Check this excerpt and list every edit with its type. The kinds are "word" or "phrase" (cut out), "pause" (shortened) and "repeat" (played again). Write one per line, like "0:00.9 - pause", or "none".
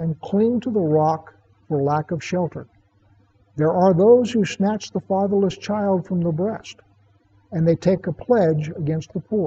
none